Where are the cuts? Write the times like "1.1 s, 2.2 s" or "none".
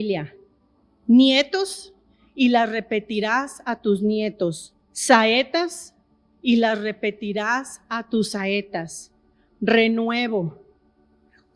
4.8 s